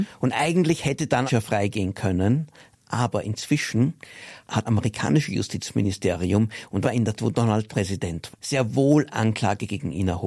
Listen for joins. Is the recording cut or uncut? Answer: cut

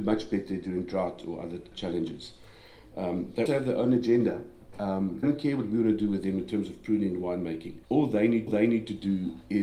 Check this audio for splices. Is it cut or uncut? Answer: cut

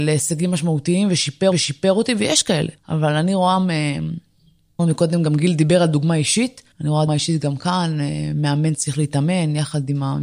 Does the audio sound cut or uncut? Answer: cut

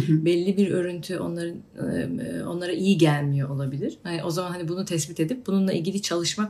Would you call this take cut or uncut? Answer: uncut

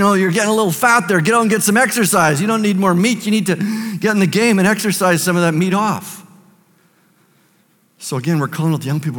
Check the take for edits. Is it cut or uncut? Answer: uncut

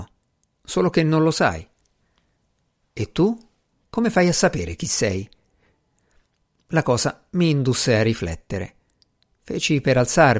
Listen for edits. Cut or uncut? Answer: uncut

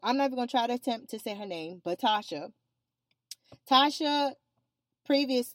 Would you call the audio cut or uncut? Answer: uncut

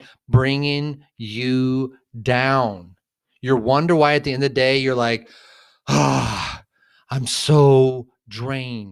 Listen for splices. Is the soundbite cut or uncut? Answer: uncut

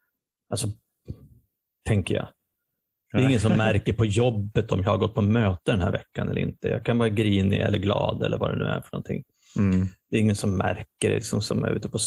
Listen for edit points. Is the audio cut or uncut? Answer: uncut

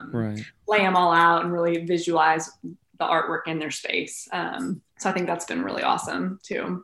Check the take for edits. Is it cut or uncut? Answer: cut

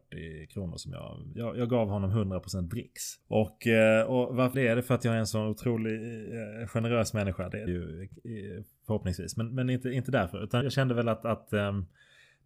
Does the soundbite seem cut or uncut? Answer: cut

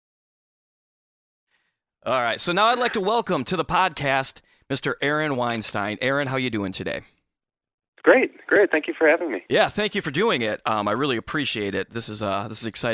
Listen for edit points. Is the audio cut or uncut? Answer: uncut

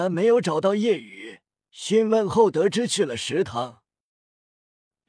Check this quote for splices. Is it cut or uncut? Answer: cut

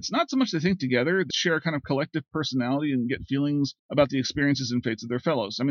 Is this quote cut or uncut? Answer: cut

